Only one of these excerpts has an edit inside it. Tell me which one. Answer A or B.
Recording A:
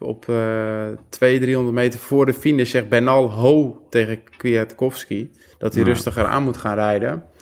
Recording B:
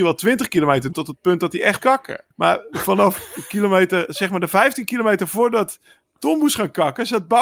B